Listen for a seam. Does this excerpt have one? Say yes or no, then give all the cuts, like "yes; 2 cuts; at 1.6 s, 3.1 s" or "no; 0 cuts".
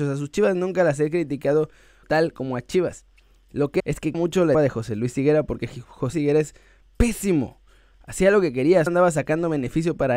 yes; 6 cuts; at 2.0 s, 3.8 s, 4.1 s, 4.5 s, 6.1 s, 8.9 s